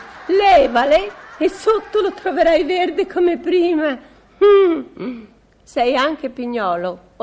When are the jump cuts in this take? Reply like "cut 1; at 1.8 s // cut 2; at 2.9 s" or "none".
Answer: none